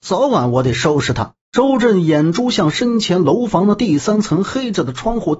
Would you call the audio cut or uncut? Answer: cut